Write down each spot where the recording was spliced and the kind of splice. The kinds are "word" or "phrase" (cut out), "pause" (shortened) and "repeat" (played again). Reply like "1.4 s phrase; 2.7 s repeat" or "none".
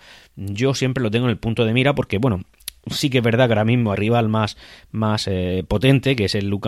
3.9 s word